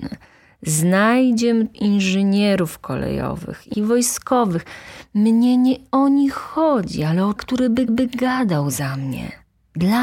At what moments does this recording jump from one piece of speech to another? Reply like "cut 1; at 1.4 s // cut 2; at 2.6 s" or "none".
cut 1; at 1.7 s // cut 2; at 3.7 s // cut 3; at 7.4 s // cut 4; at 7.9 s